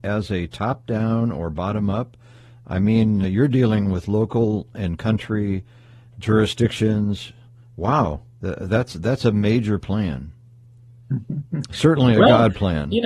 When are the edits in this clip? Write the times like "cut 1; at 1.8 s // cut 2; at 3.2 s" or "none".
cut 1; at 3.2 s